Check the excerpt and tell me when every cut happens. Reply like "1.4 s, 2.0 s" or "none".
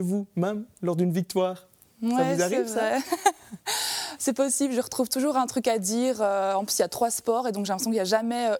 none

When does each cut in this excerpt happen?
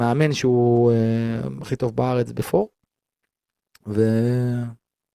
none

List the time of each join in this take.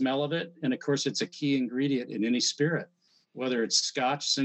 none

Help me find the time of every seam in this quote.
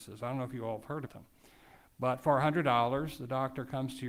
1.1 s

